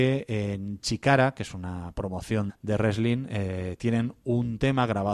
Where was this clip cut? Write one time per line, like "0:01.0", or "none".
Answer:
0:02.5